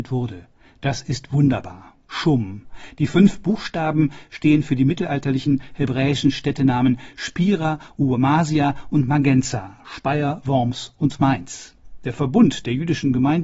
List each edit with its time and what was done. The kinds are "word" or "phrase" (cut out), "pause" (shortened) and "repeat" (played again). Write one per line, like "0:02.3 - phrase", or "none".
0:02.0 - pause